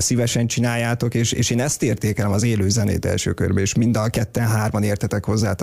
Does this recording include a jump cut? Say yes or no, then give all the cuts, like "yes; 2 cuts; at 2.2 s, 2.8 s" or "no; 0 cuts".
no; 0 cuts